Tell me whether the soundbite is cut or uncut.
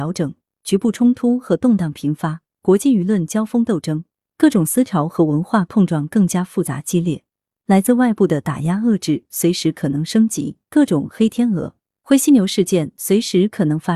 uncut